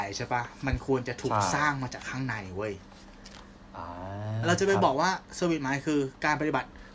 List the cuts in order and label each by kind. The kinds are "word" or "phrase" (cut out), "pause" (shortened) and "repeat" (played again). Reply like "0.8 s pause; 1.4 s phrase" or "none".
4.4 s phrase